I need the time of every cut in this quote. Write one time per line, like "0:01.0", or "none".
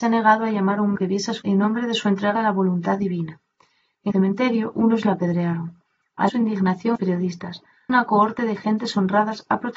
0:01.0
0:01.4
0:02.3
0:04.1
0:05.0
0:06.3
0:06.9
0:07.9